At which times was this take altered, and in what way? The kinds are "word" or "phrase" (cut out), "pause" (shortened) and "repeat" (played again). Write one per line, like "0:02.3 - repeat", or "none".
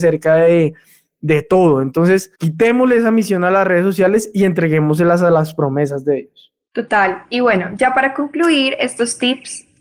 0:02.3 - pause

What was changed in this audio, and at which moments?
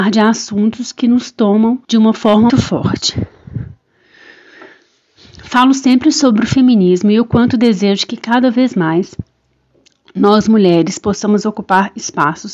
0:01.8 - pause
0:02.5 - word

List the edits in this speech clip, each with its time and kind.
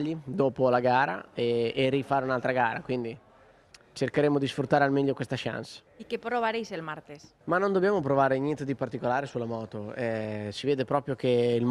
0:03.7 - pause
0:05.9 - pause
0:07.4 - pause

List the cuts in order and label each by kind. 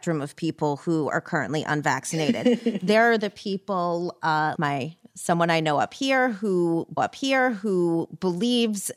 0:04.6 - word
0:07.0 - repeat

